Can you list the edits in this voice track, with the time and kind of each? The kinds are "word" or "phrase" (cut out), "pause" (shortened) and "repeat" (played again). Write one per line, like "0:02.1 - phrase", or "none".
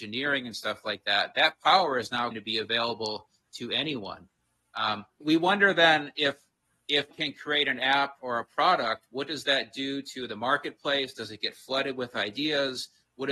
0:02.3 - word
0:05.2 - word
0:07.1 - word
0:08.2 - word